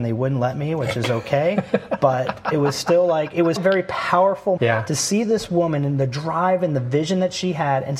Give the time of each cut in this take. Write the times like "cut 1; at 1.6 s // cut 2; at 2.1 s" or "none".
cut 1; at 3.6 s // cut 2; at 4.6 s